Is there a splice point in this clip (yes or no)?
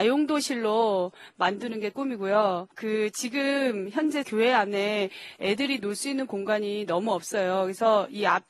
yes